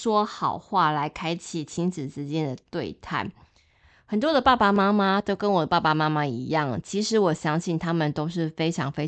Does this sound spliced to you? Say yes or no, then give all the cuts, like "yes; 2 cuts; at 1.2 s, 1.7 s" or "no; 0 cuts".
no; 0 cuts